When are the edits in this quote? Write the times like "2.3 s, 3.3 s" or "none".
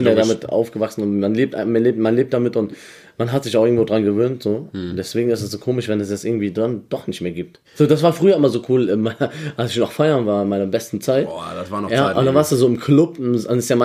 7.6 s

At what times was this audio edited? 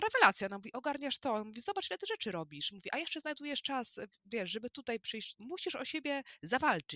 5.3 s

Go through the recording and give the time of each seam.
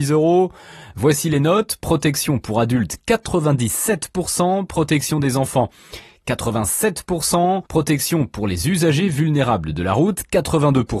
7.7 s

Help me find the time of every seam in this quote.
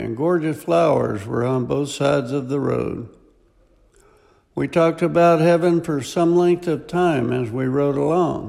none

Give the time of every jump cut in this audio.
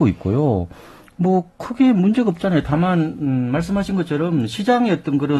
none

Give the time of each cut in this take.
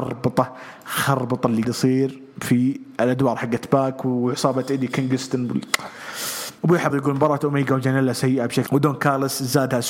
1.6 s, 6.6 s, 6.9 s, 8.7 s

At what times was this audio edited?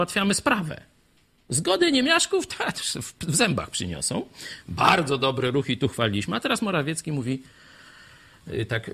none

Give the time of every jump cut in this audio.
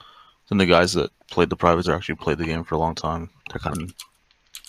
1.8 s, 3.4 s, 3.7 s

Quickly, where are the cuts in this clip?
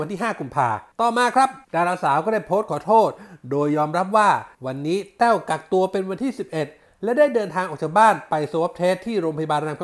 0.9 s, 1.6 s, 4.5 s

